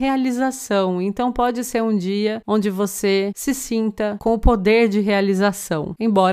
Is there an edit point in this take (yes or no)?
no